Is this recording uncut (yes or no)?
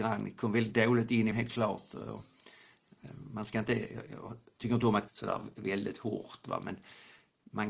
no